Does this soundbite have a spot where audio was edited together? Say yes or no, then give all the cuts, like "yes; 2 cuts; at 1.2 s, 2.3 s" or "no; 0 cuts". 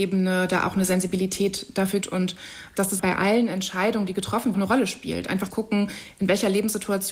yes; 4 cuts; at 2.0 s, 3.0 s, 4.5 s, 5.5 s